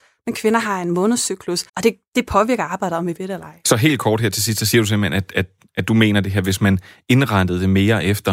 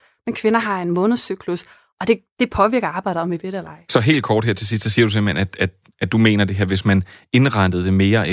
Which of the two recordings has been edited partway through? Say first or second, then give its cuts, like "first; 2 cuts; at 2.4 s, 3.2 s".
first; 1 cut; at 1.7 s